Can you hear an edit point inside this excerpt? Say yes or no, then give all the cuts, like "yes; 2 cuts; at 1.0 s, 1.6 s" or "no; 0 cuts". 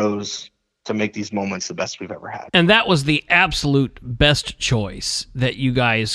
no; 0 cuts